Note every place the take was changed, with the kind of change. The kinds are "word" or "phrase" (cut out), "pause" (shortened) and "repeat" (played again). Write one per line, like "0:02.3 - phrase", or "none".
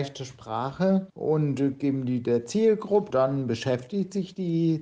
0:01.1 - pause
0:03.1 - word